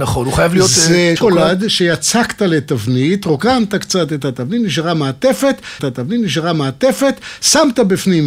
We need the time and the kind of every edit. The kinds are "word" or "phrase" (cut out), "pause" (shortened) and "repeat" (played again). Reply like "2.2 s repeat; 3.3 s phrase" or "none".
1.2 s word; 5.8 s repeat